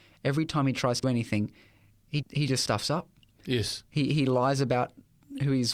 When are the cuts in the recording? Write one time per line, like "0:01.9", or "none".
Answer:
0:01.0
0:02.2
0:03.9